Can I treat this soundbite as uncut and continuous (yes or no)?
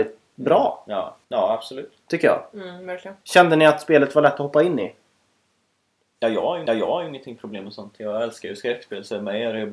no